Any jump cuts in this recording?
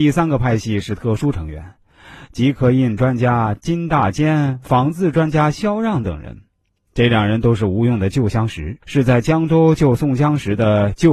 yes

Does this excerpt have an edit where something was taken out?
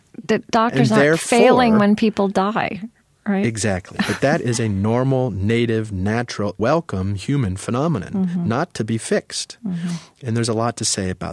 yes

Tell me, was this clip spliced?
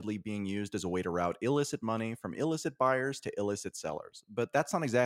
no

